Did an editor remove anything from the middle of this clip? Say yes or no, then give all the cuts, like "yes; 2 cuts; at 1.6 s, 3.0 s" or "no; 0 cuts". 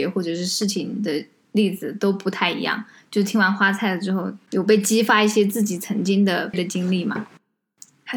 yes; 1 cut; at 6.5 s